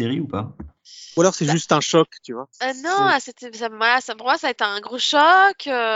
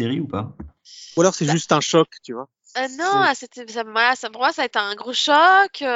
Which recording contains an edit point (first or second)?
first